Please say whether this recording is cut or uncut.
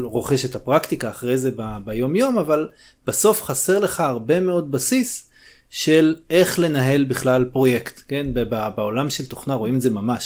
uncut